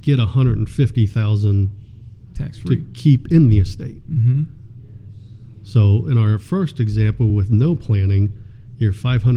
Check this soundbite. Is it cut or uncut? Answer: uncut